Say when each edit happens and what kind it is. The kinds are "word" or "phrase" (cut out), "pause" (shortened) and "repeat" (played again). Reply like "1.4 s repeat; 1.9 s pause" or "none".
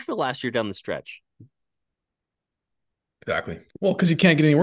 3.7 s pause